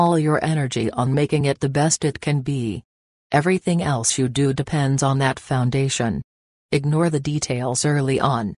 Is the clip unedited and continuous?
yes; 0 cuts

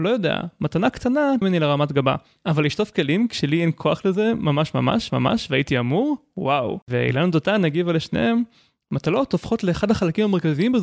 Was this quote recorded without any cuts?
no; 3 cuts; at 1.4 s, 5.1 s, 6.8 s

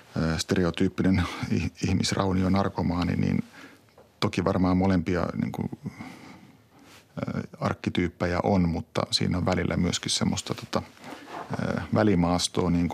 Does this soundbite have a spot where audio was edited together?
no; 0 cuts

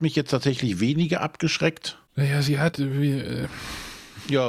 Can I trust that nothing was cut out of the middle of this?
no; 2 cuts; at 2.1 s, 2.7 s

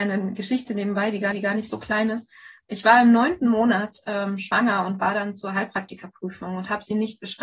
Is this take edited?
yes; 1 cut; at 1.3 s

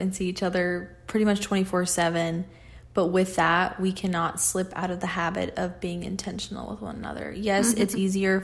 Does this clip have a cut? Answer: no; 0 cuts

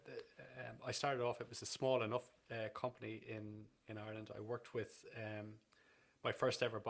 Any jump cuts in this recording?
no; 0 cuts

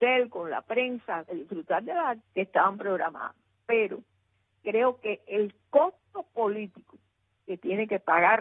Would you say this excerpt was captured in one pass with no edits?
no; 2 cuts; at 1.3 s, 2.2 s

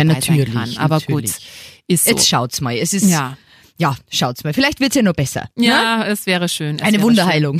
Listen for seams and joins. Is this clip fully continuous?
yes; 0 cuts

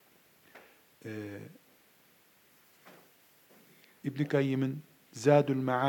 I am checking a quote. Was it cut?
no; 0 cuts

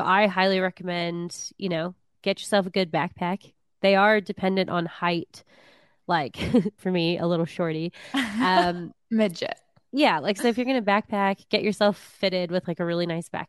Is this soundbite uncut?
no; 1 cut; at 6.8 s

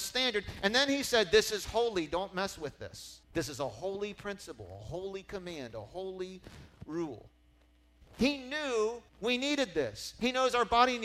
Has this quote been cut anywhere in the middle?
yes; 2 cuts; at 3.2 s, 9.1 s

